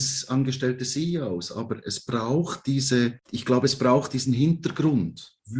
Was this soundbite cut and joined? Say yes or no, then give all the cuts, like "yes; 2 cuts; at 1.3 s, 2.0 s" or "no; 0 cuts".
no; 0 cuts